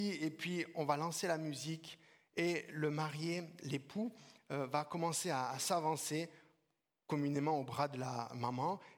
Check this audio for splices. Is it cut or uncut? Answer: uncut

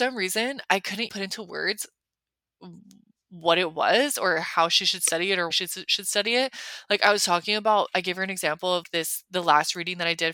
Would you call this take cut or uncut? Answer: cut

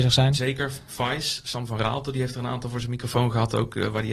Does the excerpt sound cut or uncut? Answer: uncut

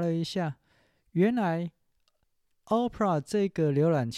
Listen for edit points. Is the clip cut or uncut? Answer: uncut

